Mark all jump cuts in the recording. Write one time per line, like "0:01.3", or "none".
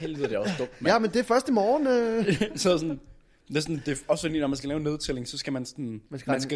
none